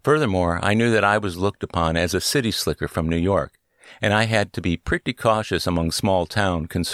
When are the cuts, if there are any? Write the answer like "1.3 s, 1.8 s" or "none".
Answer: none

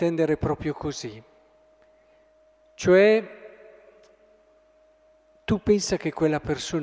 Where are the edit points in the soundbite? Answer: none

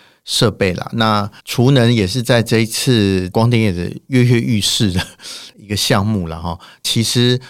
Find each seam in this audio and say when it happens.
1.4 s

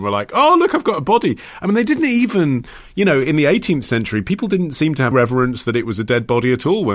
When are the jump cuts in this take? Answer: 5.1 s

